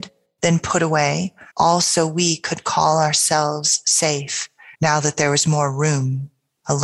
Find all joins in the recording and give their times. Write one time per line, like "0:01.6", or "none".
0:01.5
0:04.7